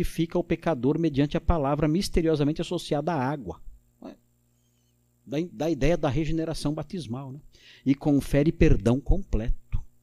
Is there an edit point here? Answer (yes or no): no